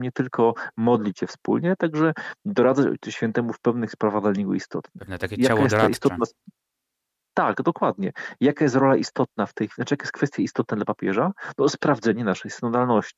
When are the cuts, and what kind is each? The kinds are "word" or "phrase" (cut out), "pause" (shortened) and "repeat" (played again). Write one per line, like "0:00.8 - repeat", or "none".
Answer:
none